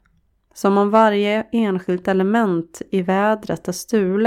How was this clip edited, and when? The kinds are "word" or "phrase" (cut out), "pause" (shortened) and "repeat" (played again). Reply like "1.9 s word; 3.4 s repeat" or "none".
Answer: none